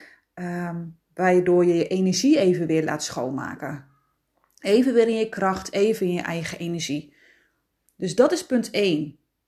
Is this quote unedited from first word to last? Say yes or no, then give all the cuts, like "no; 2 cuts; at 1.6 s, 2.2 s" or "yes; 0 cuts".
yes; 0 cuts